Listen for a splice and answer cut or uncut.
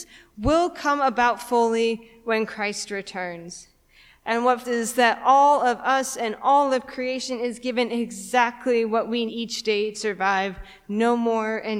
cut